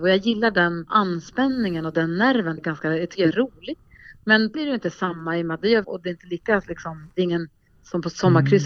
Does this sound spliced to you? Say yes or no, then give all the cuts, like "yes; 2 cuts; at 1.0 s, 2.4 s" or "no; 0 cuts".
yes; 3 cuts; at 2.6 s, 4.5 s, 5.8 s